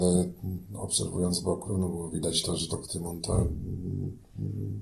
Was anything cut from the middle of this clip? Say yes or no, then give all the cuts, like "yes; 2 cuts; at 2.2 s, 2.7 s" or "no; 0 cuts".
yes; 3 cuts; at 1.6 s, 2.7 s, 3.2 s